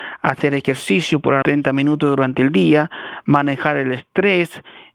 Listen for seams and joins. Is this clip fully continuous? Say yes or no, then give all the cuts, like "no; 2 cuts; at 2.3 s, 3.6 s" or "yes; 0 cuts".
no; 1 cut; at 1.4 s